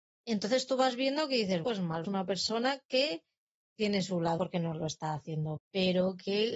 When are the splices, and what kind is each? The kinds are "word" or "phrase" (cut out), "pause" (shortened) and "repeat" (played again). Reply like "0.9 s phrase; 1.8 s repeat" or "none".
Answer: 1.6 s word; 2.0 s word; 4.4 s word; 5.6 s word